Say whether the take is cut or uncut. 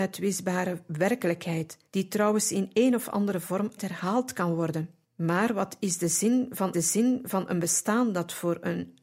cut